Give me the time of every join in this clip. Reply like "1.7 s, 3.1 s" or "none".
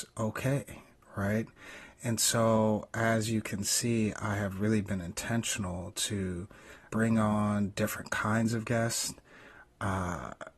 6.9 s